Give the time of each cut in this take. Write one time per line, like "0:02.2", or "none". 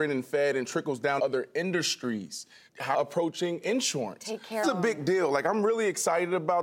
0:01.2
0:02.9
0:04.6